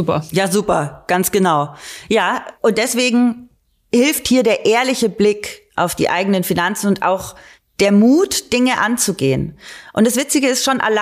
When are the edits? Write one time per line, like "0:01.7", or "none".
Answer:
none